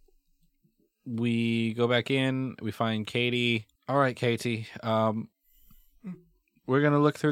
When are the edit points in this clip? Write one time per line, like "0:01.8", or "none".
0:03.8